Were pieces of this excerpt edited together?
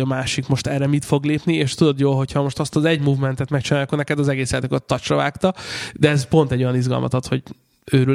no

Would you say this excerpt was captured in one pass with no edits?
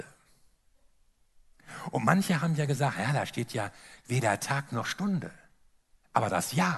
yes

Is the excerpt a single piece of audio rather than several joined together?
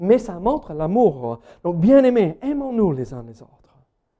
yes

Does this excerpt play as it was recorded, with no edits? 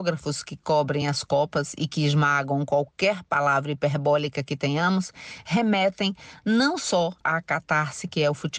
yes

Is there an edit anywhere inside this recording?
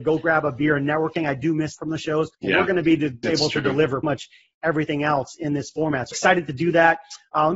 yes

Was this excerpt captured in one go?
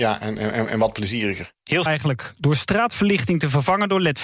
no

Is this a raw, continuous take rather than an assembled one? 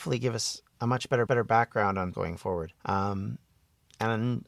no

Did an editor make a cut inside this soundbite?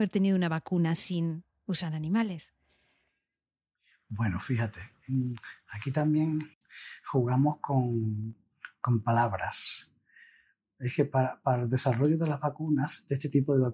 no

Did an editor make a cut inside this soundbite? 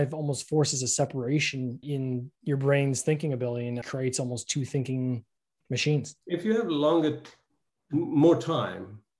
yes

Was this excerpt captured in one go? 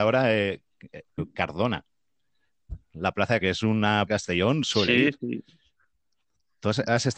no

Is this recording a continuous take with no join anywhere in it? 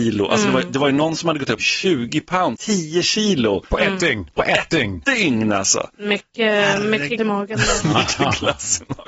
no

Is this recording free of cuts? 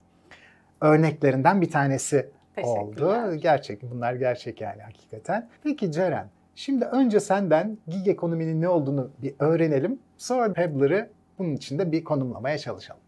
no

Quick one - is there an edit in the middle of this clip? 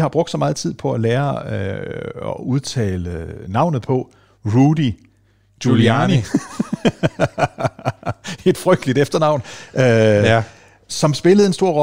no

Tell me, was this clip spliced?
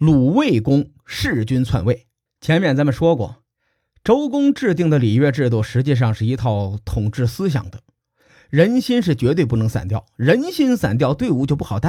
yes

